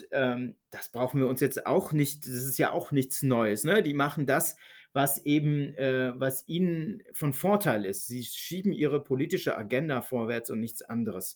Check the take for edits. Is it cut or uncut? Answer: uncut